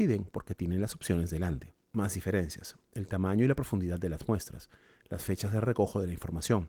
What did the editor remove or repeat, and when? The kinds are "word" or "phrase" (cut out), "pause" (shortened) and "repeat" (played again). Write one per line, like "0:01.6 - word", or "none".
0:01.8 - pause